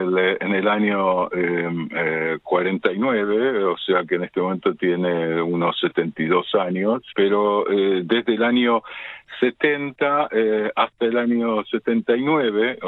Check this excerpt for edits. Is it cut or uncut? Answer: cut